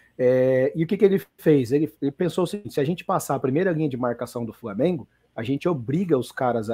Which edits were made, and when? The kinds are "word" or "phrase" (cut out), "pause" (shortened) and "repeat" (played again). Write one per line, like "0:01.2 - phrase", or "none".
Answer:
none

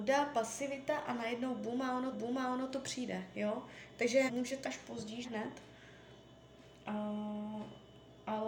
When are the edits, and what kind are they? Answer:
0:02.1 - repeat
0:04.3 - word
0:04.6 - word
0:05.2 - word

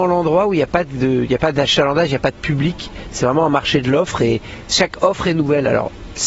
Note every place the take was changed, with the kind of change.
none

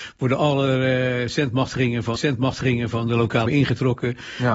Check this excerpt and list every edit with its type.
0:02.2 - repeat
0:03.5 - word

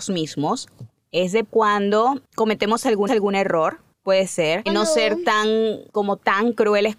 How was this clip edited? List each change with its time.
0:01.4 - word
0:03.1 - repeat
0:04.7 - word
0:05.9 - pause

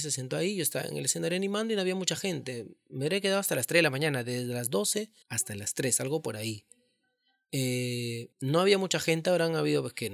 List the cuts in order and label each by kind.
0:05.2 - pause
0:08.3 - pause

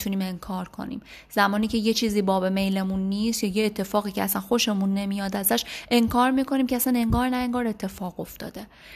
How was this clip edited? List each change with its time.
none

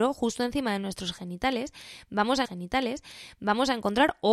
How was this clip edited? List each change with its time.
0:02.4 - repeat

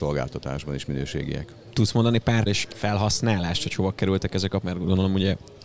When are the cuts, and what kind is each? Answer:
0:02.5 - phrase
0:04.6 - word

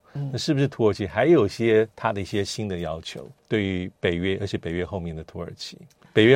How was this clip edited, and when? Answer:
0:01.9 - pause
0:03.4 - pause

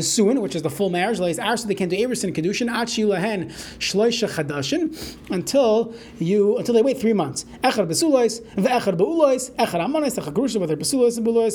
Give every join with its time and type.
none

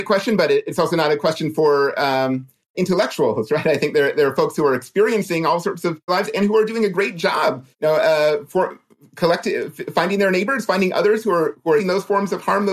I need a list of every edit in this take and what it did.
0:02.7 - word
0:06.1 - phrase
0:07.7 - pause
0:11.8 - word

